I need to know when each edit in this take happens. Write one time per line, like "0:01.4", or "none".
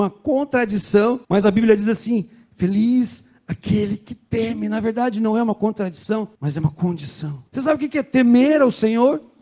0:01.2
0:06.3
0:07.5

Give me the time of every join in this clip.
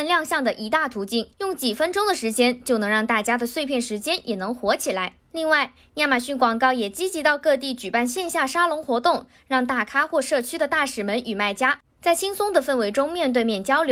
0:01.3
0:05.2

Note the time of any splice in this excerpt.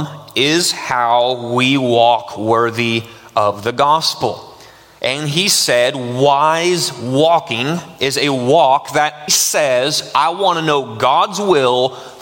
0:09.3

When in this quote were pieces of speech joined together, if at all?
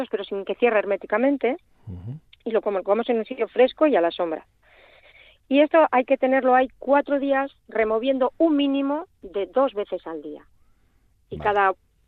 none

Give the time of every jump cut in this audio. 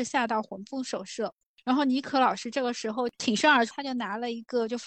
none

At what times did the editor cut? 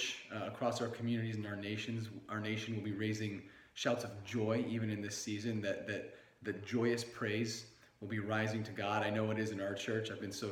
none

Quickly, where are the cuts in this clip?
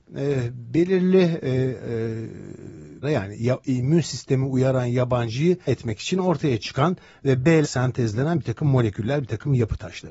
0:03.0
0:05.7
0:07.6

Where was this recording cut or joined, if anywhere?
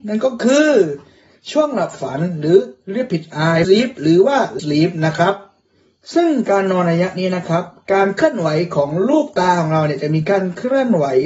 0:03.6
0:04.6

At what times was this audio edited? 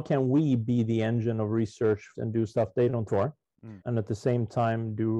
0:02.1
0:03.1
0:03.8

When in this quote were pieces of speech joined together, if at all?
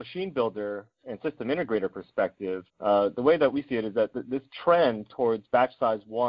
0:02.7

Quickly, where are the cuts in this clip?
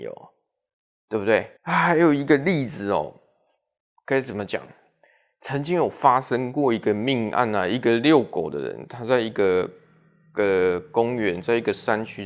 0:01.6

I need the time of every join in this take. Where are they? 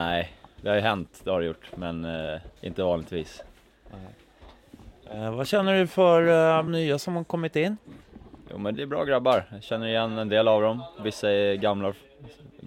0:02.6
0:06.7
0:08.7

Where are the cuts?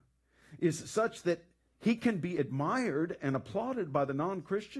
none

